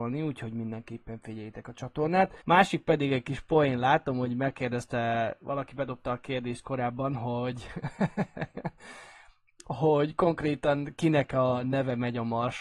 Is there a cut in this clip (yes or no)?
yes